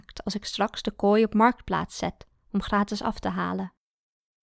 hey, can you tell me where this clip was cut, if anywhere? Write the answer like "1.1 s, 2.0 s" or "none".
none